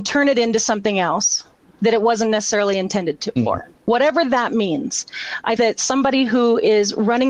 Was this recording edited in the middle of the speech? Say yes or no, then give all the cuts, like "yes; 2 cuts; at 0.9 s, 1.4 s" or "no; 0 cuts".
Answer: yes; 4 cuts; at 1.6 s, 3.4 s, 3.8 s, 5.6 s